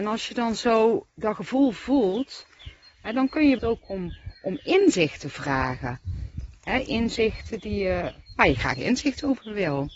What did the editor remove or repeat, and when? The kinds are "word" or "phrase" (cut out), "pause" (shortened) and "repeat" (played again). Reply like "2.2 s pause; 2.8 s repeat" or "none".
3.6 s word